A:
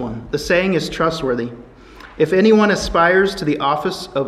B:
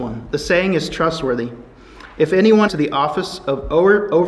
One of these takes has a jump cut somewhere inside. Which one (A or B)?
B